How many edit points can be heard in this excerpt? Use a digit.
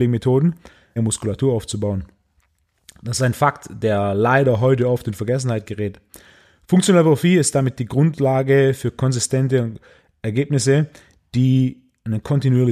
1